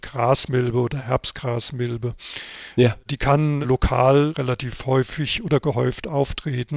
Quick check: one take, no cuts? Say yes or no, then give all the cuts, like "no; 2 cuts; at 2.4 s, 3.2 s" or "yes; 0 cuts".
yes; 0 cuts